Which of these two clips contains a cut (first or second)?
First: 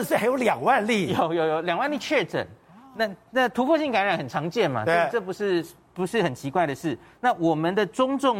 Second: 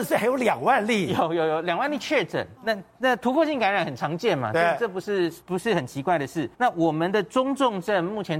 second